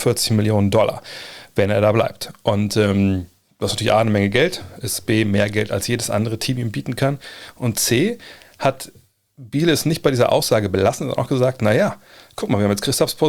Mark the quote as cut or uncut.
uncut